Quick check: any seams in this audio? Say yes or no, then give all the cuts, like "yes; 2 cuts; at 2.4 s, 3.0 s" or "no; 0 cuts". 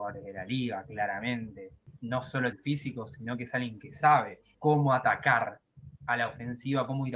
yes; 1 cut; at 2.5 s